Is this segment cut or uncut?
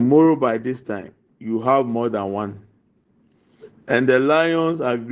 uncut